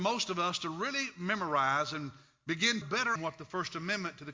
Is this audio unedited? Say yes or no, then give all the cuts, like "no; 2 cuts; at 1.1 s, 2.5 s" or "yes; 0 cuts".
no; 2 cuts; at 2.8 s, 3.2 s